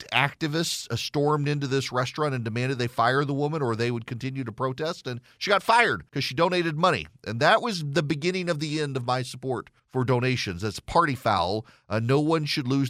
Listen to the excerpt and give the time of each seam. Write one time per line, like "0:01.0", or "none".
0:06.1
0:09.8